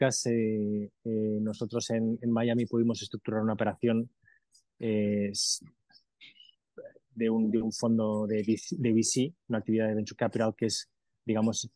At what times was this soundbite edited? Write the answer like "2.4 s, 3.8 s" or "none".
none